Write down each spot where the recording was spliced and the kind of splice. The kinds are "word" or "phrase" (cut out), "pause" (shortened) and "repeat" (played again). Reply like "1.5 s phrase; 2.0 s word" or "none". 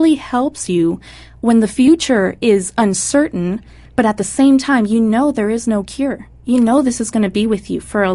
none